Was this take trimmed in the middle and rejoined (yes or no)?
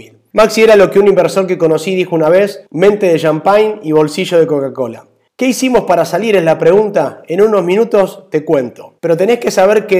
yes